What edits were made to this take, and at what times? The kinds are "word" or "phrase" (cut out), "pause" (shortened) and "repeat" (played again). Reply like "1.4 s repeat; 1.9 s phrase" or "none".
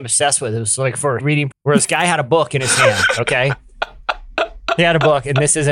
1.2 s word; 1.5 s word